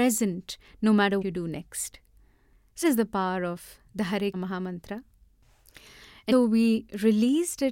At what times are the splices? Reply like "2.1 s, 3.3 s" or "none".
1.2 s, 2.8 s, 4.3 s, 6.3 s